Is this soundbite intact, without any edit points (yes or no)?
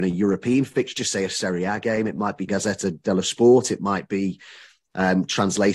no